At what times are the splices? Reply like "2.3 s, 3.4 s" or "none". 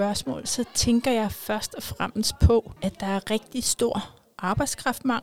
2.8 s